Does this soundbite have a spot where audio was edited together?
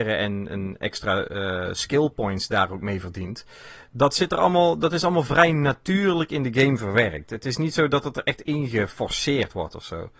no; 0 cuts

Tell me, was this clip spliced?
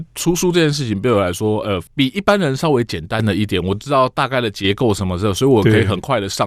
no; 0 cuts

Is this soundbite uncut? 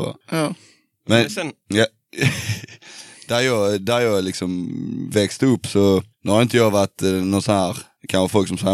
yes; 0 cuts

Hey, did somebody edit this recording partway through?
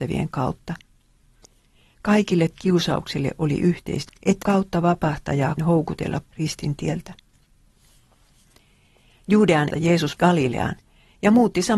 yes; 7 cuts; at 2.5 s, 4.1 s, 4.4 s, 5.6 s, 6.3 s, 9.7 s, 10.2 s

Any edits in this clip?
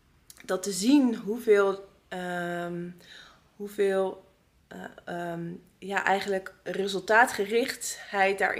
no; 0 cuts

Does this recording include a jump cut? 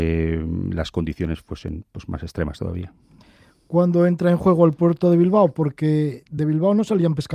no; 0 cuts

